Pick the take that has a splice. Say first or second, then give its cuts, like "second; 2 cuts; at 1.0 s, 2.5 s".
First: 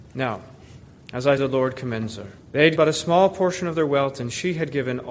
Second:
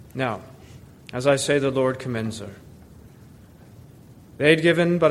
first; 3 cuts; at 1.4 s, 2.4 s, 2.8 s